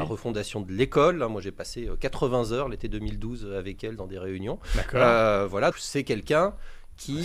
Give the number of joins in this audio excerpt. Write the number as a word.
one